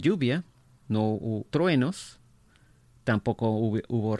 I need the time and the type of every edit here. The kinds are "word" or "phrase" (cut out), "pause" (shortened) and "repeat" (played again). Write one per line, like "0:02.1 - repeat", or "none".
0:01.5 - word